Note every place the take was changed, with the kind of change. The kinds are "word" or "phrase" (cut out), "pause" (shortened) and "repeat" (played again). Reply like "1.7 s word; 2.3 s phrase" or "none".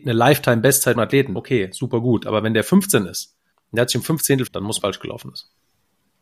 1.0 s phrase; 1.4 s word; 3.5 s pause; 4.5 s word; 4.8 s phrase